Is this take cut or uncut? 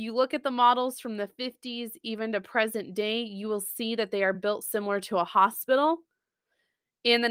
uncut